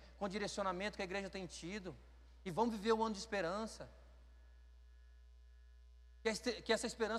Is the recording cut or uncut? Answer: uncut